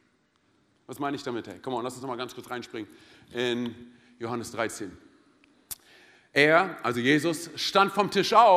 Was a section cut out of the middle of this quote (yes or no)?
no